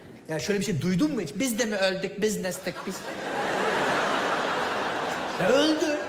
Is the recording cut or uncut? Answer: uncut